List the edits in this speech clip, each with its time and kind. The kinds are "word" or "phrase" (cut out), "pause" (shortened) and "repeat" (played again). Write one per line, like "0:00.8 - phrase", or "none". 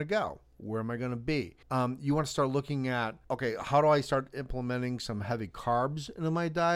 0:01.6 - pause
0:03.2 - pause